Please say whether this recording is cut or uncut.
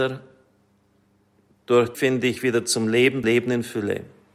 cut